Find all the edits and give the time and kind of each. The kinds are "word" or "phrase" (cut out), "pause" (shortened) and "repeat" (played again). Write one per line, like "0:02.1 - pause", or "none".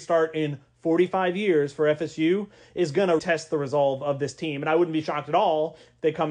0:03.2 - word